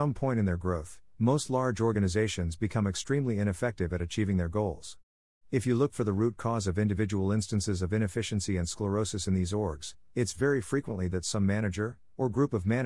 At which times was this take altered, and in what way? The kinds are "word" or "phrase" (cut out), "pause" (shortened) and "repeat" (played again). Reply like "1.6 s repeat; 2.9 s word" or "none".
none

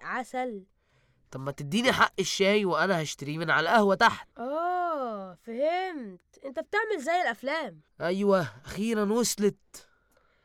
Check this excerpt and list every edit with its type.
4.3 s pause; 7.9 s pause

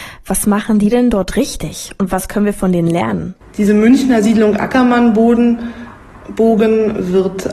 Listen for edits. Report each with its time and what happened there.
none

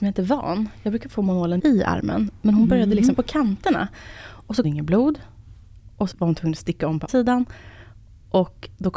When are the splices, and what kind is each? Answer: 1.6 s word; 3.2 s word; 4.6 s word; 6.1 s word; 7.1 s word

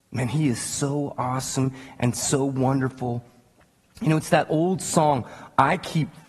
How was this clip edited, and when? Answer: none

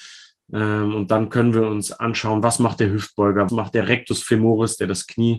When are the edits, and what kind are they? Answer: 3.5 s word

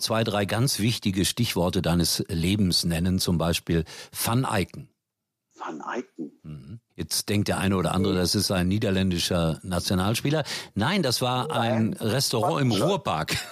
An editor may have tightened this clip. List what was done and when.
5.1 s pause; 6.9 s pause

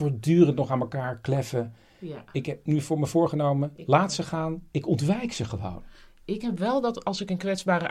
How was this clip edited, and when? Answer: none

